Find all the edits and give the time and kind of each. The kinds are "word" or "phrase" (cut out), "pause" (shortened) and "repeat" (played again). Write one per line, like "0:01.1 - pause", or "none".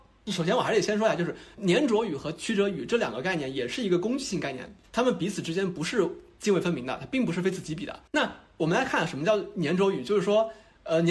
0:08.1 - pause